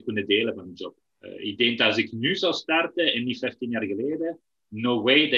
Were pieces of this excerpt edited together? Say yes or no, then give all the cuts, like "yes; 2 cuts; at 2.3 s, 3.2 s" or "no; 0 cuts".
yes; 1 cut; at 1.0 s